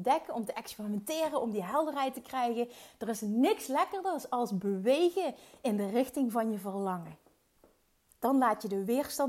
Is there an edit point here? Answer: no; 0 cuts

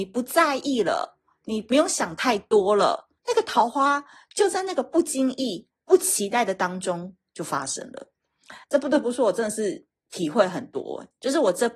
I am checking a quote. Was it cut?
yes; 2 cuts; at 3.2 s, 8.6 s

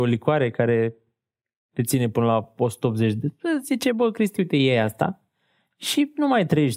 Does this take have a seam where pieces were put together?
no; 0 cuts

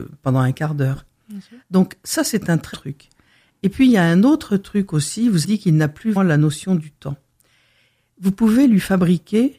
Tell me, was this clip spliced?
yes; 3 cuts; at 2.7 s, 5.4 s, 6.2 s

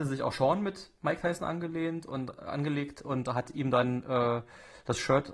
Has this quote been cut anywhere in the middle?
no; 0 cuts

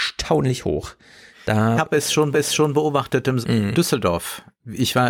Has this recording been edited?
yes; 3 cuts; at 1.8 s, 2.3 s, 3.4 s

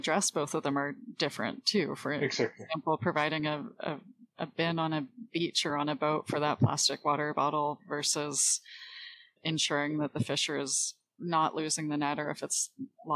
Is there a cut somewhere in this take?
no; 0 cuts

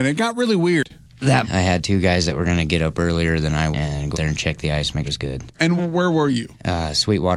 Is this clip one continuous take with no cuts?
no; 5 cuts; at 1.4 s, 3.7 s, 4.1 s, 5.0 s, 5.8 s

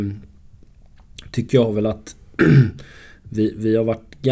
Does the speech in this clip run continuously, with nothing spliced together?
yes; 0 cuts

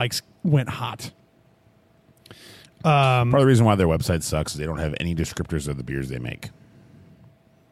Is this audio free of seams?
yes; 0 cuts

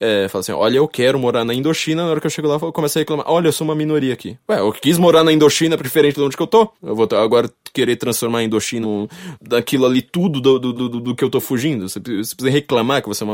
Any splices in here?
yes; 4 cuts; at 5.8 s, 6.8 s, 8.8 s, 10.8 s

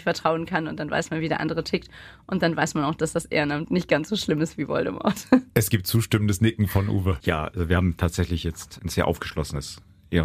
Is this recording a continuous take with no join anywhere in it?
yes; 0 cuts

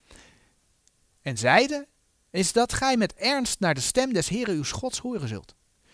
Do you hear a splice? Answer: no; 0 cuts

